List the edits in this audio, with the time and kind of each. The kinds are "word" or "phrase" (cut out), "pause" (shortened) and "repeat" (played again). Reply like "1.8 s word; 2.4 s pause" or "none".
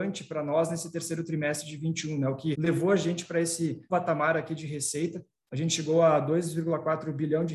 2.5 s word; 3.9 s word